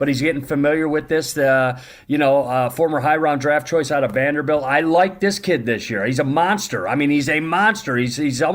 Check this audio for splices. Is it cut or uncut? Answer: uncut